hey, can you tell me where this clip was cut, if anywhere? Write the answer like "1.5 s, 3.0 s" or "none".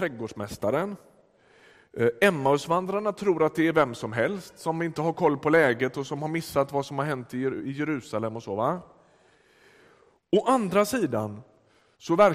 none